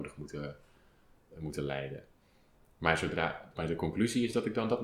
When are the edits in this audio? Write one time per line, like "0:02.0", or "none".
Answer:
0:03.5